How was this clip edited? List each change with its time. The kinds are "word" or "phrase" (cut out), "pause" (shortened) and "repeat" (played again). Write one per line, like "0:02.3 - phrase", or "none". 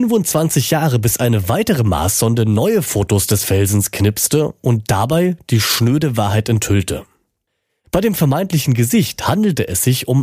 none